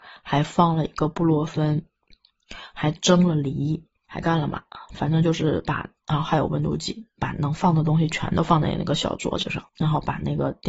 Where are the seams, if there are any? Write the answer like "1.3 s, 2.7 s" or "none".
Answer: 9.7 s